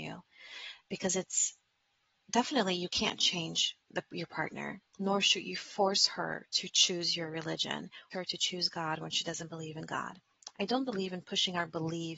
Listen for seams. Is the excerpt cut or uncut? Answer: cut